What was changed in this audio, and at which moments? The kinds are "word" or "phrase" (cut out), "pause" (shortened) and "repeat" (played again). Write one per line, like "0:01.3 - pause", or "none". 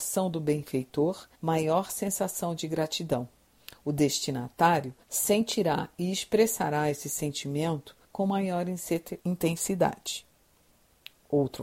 0:01.3 - pause
0:05.0 - pause
0:08.0 - pause
0:09.2 - pause